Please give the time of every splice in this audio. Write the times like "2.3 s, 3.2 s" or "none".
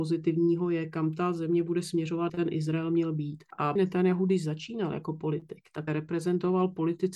2.3 s, 3.8 s, 5.9 s